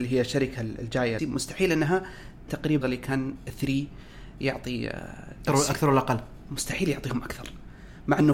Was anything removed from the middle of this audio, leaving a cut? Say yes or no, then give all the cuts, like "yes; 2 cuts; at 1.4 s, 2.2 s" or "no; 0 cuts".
yes; 4 cuts; at 1.2 s, 2.5 s, 2.8 s, 5.5 s